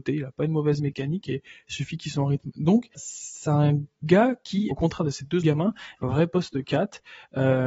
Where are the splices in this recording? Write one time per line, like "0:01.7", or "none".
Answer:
0:02.9
0:04.7
0:05.4
0:06.0